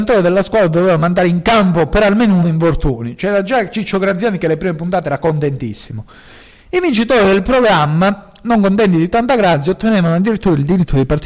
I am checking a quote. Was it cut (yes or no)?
yes